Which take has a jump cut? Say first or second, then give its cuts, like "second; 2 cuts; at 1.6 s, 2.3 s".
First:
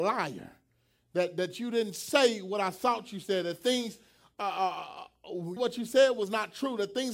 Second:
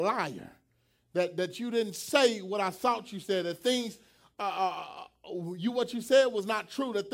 first; 1 cut; at 5.6 s